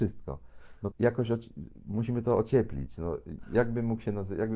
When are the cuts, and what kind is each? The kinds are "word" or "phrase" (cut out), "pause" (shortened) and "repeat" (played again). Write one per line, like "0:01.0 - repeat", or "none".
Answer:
0:00.9 - word